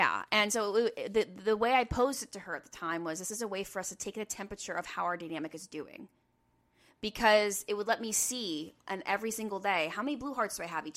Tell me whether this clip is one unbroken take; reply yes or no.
yes